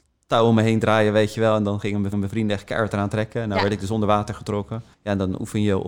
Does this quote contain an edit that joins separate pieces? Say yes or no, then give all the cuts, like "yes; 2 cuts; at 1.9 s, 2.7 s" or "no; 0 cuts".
yes; 2 cuts; at 2.1 s, 4.9 s